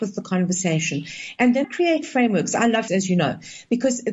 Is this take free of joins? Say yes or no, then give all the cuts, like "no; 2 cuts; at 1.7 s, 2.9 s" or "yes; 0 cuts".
no; 2 cuts; at 1.6 s, 2.9 s